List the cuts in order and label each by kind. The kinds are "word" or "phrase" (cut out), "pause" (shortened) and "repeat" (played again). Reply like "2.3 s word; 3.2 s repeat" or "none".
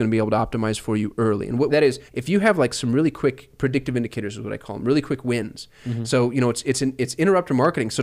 1.7 s phrase; 2.1 s pause